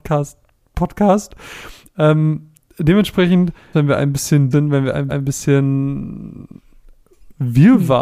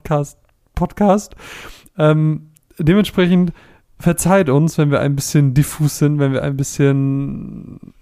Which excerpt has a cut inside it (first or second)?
first